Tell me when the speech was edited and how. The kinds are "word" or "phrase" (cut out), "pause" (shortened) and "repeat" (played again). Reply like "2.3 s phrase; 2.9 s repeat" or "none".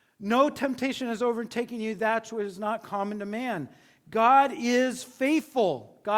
none